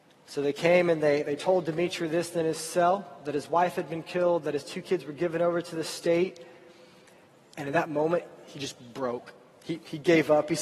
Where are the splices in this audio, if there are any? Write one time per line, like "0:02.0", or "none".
none

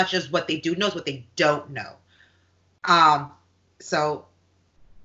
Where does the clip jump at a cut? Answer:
none

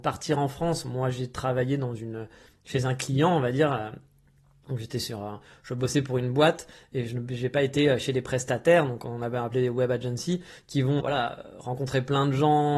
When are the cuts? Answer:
0:11.0

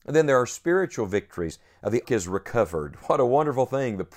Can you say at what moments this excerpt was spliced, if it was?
0:02.0

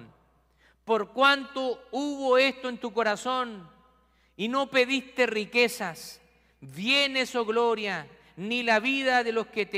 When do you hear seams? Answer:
none

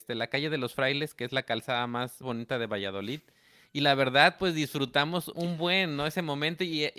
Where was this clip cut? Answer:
0:02.2
0:05.3

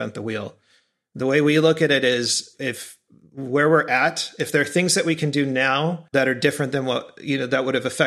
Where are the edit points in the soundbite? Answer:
0:06.1

